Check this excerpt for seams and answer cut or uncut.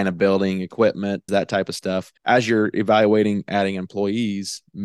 cut